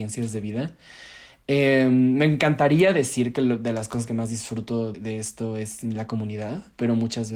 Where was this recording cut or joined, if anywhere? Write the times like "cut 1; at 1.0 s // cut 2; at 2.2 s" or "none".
cut 1; at 4.9 s